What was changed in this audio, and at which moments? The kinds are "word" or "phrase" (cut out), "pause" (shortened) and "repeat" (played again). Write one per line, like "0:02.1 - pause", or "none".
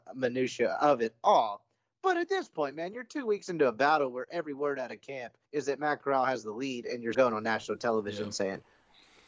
0:05.4 - pause
0:07.1 - word